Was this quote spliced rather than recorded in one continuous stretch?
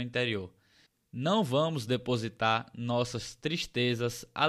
no; 0 cuts

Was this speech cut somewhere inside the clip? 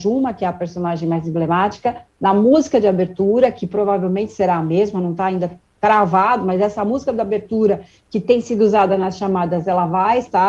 no; 0 cuts

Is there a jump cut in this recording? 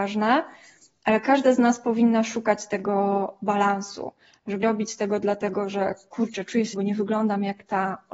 yes; 2 cuts; at 4.6 s, 6.7 s

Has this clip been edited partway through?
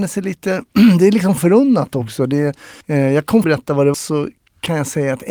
yes; 4 cuts; at 1.4 s, 2.8 s, 3.4 s, 3.9 s

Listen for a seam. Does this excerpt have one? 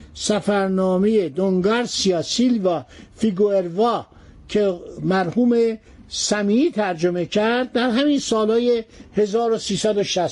no; 0 cuts

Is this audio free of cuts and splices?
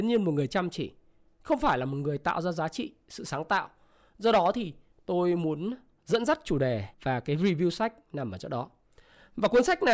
no; 1 cut; at 6.9 s

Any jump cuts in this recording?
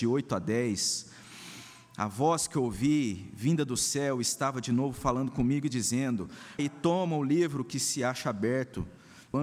yes; 1 cut; at 6.6 s

